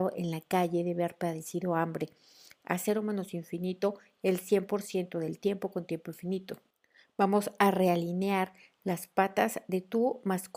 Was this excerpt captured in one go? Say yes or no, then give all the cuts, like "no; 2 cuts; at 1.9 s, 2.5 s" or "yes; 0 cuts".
yes; 0 cuts